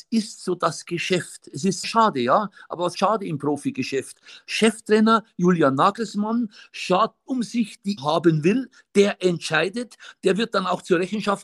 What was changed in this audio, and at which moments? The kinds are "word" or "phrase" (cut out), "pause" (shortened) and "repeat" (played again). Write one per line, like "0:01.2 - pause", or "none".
0:01.8 - word
0:02.9 - word
0:07.3 - word
0:08.0 - word